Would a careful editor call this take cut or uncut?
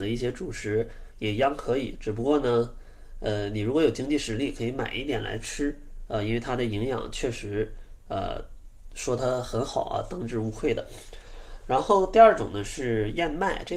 uncut